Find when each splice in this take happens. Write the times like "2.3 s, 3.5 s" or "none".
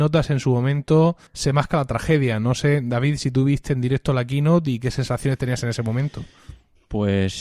1.3 s

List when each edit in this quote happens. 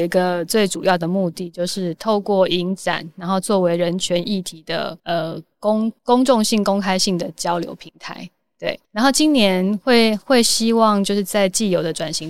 5.0 s, 6.0 s, 8.8 s

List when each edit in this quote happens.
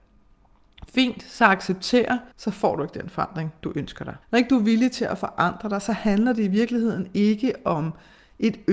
2.3 s, 4.2 s

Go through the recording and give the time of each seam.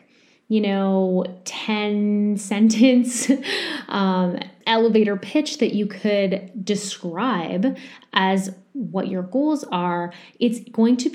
none

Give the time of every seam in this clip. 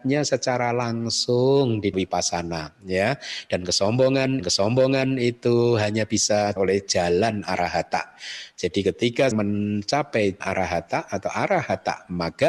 1.9 s, 4.4 s, 6.6 s, 9.3 s, 10.4 s

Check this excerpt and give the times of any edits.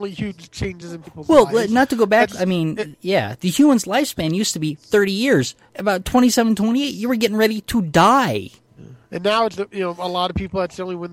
9.5 s

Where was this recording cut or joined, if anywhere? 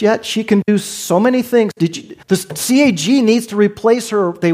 2.2 s

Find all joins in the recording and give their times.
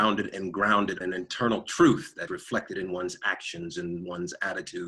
1.0 s, 2.3 s

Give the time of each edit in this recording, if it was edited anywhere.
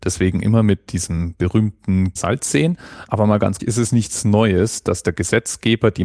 2.2 s, 3.6 s

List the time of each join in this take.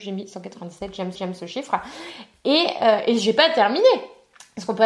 1.1 s

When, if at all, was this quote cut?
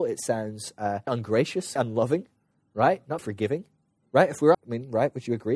1.1 s, 1.8 s, 3.2 s, 4.5 s

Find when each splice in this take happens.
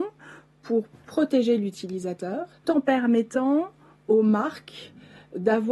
2.6 s

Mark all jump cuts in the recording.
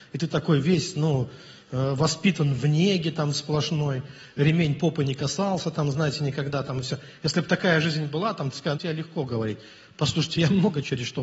8.7 s

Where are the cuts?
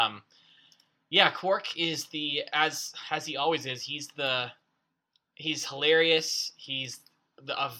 none

